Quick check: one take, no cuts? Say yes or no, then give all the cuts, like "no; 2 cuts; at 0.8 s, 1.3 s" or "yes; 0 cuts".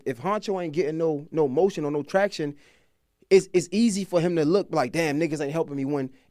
yes; 0 cuts